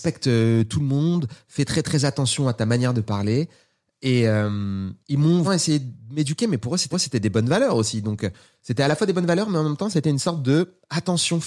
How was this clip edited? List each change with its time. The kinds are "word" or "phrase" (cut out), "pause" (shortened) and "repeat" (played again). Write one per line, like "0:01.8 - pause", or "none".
0:05.0 - pause
0:05.4 - word
0:06.9 - repeat